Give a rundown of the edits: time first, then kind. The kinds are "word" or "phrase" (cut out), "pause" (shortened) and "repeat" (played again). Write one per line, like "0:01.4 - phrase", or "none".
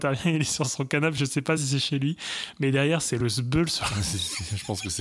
none